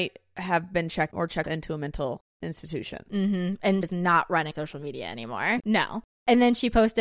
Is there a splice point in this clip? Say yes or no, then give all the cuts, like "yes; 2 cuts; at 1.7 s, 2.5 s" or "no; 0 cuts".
yes; 6 cuts; at 1.1 s, 1.4 s, 2.3 s, 3.8 s, 4.5 s, 5.6 s